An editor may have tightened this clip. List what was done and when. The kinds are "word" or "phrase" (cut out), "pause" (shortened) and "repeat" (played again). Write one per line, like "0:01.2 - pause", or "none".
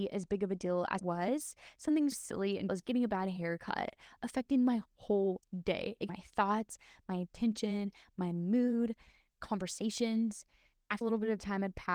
0:01.0 - word
0:02.1 - word
0:02.7 - word
0:06.1 - word
0:09.4 - word
0:11.0 - word